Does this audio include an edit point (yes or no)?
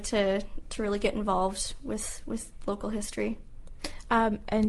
no